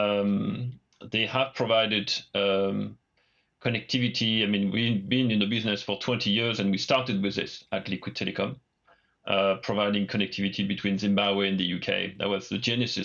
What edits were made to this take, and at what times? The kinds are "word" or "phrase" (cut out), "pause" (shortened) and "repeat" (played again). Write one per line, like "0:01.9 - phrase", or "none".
none